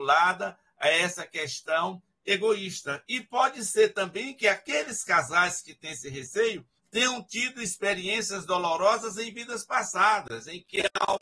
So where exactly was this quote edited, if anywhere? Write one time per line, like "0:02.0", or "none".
0:06.8